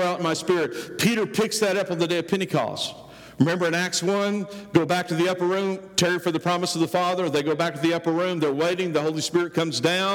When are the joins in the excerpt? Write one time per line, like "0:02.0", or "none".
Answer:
none